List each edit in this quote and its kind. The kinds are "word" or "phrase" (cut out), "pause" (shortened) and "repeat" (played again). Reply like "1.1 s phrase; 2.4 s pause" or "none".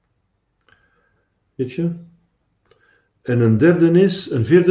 none